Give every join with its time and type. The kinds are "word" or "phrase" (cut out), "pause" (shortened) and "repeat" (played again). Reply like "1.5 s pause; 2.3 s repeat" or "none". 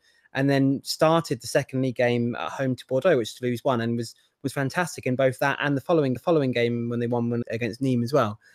6.2 s repeat; 7.4 s word